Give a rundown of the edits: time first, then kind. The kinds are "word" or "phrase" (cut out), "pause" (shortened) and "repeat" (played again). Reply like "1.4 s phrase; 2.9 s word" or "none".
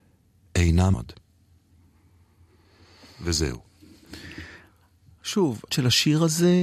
0.9 s word; 5.7 s word